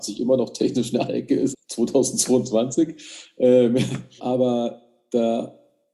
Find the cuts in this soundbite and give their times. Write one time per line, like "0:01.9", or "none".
0:01.1
0:01.5
0:04.2